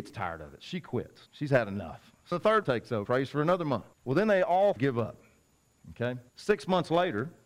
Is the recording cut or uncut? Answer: cut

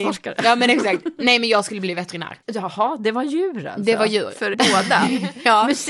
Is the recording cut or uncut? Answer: cut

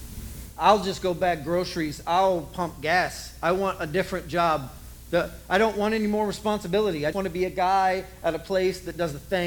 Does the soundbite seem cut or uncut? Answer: cut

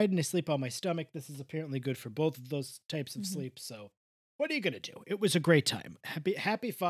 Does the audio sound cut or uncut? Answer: uncut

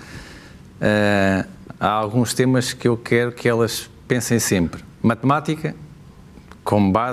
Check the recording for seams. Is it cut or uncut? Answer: cut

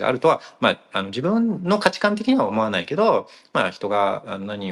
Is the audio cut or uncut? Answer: uncut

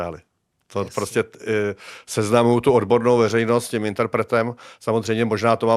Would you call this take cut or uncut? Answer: uncut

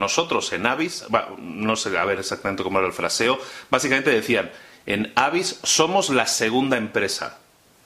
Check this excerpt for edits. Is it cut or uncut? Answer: uncut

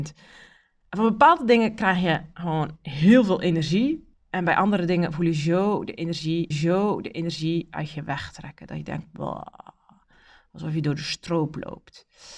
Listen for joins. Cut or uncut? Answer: cut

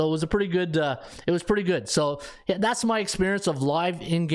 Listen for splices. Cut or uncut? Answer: uncut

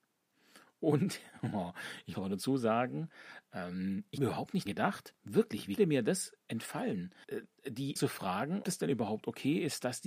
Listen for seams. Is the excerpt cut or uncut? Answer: cut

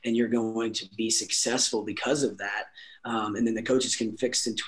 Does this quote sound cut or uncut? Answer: uncut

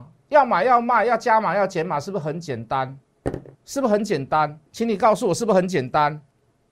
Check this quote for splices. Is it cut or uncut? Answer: cut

